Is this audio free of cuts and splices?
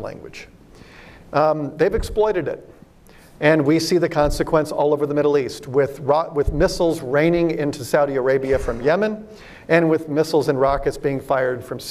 yes; 0 cuts

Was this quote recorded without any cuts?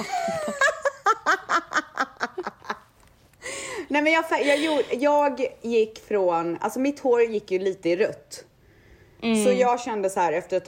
yes; 0 cuts

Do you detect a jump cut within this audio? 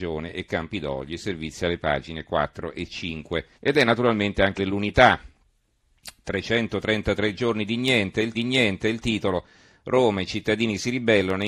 yes; 3 cuts; at 3.5 s, 4.6 s, 8.3 s

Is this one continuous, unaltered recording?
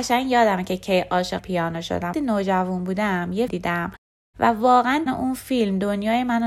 no; 4 cuts; at 1.4 s, 2.1 s, 3.5 s, 5.1 s

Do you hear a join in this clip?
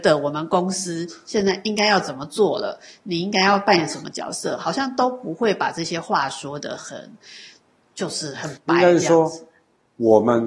no; 0 cuts

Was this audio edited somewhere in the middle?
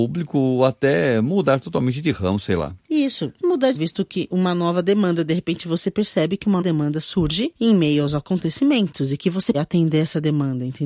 yes; 4 cuts; at 3.4 s, 3.7 s, 6.6 s, 9.5 s

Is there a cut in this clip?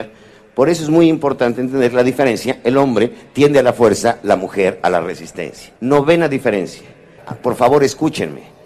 yes; 1 cut; at 5.8 s

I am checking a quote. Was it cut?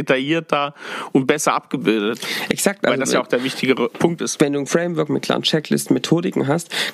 yes; 1 cut; at 4.7 s

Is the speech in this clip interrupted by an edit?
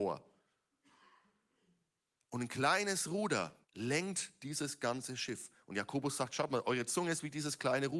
yes; 1 cut; at 3.6 s

